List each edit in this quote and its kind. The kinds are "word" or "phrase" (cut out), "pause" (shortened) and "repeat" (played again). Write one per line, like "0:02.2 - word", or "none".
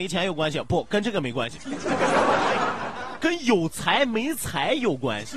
0:03.2 - word